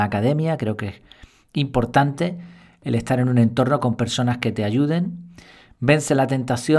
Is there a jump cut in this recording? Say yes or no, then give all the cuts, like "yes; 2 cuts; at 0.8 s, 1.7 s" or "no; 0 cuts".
no; 0 cuts